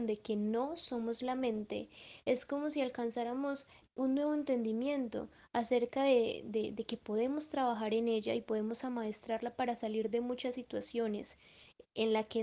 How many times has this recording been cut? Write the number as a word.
zero